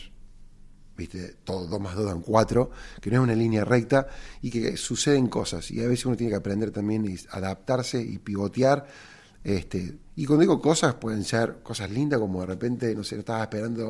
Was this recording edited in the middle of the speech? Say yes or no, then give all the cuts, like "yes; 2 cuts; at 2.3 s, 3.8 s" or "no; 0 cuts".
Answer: no; 0 cuts